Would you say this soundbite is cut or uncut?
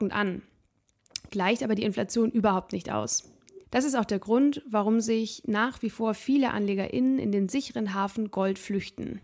cut